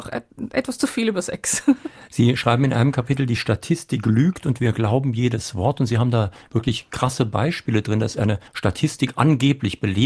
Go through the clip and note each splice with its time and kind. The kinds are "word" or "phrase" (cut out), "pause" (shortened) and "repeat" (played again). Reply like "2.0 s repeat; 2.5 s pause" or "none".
8.5 s pause